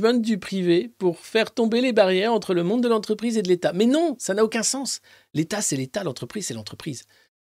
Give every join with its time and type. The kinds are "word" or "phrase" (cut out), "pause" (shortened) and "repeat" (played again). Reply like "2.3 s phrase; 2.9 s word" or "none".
none